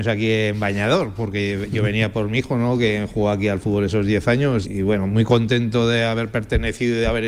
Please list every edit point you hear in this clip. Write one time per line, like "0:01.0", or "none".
0:04.6